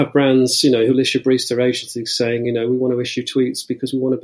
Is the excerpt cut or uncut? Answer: uncut